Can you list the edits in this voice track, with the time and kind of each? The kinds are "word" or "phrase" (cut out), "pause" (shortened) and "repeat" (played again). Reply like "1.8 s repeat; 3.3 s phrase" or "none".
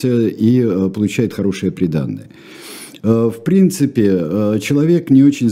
none